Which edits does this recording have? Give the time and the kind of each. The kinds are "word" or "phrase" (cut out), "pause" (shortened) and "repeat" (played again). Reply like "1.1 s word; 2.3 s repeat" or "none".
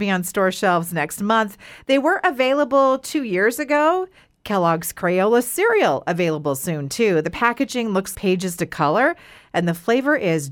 8.1 s word